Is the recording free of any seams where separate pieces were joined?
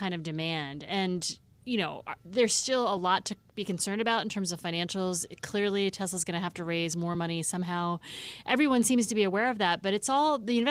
yes; 0 cuts

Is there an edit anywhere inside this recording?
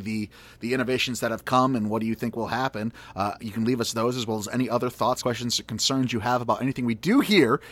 yes; 1 cut; at 5.2 s

